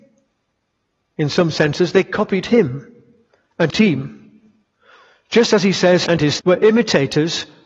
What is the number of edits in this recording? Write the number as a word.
three